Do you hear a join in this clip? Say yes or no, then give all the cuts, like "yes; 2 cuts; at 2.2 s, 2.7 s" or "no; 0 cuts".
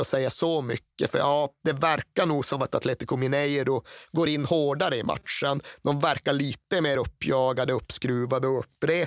no; 0 cuts